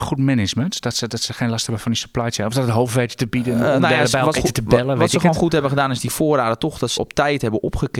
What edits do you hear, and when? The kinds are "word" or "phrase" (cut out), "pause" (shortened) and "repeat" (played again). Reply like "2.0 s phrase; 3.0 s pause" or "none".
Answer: 1.1 s word; 4.4 s word; 7.0 s word